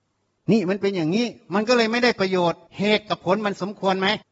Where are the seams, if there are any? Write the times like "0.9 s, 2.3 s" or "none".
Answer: 2.7 s